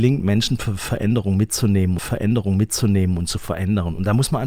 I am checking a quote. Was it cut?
yes; 1 cut; at 2.0 s

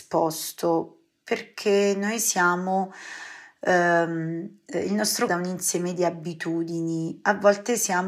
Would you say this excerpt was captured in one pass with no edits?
no; 1 cut; at 5.3 s

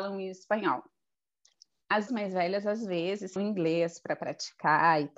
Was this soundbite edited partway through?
yes; 2 cuts; at 2.1 s, 3.4 s

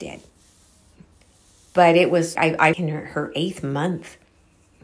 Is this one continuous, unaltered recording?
no; 2 cuts; at 2.4 s, 2.7 s

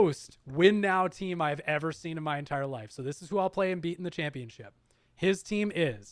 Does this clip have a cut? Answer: no; 0 cuts

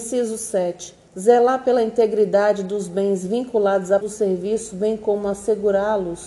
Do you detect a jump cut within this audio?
yes; 2 cuts; at 1.1 s, 4.0 s

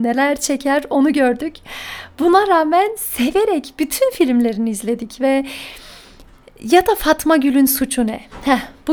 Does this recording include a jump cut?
no; 0 cuts

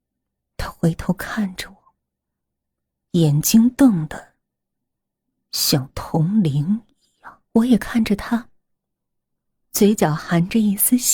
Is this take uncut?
no; 1 cut; at 7.5 s

